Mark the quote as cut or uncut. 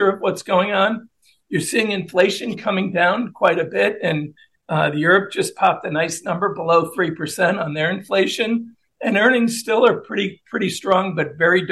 uncut